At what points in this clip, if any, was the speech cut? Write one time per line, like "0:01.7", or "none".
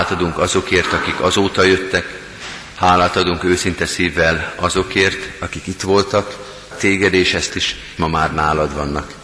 0:06.7
0:07.5
0:08.0